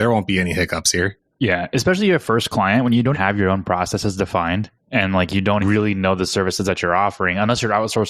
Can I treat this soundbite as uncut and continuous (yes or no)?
no